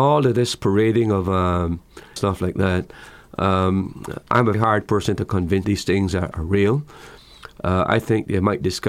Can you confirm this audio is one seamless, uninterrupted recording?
no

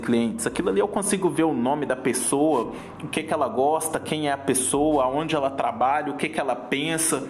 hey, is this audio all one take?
yes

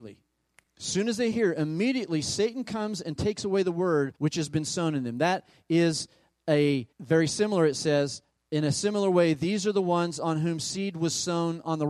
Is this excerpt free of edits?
no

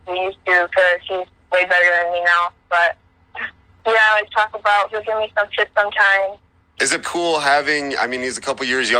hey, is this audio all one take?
no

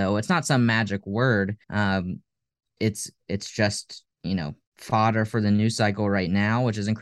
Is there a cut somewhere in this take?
yes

